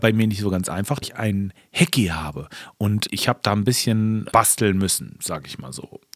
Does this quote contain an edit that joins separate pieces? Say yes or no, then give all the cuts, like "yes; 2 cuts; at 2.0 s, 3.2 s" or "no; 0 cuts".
yes; 3 cuts; at 1.0 s, 3.1 s, 4.3 s